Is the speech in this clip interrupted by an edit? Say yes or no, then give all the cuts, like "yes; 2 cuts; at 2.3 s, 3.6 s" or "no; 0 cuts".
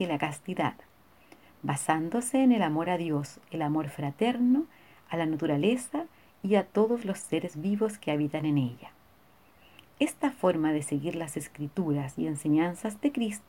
no; 0 cuts